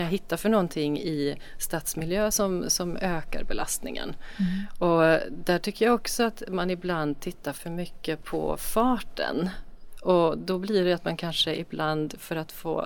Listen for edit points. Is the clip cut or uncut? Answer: uncut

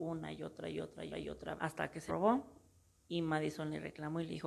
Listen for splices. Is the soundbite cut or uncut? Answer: cut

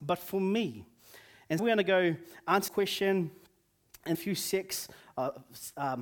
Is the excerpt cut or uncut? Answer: cut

